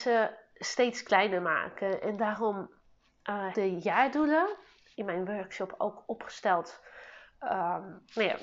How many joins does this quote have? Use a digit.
1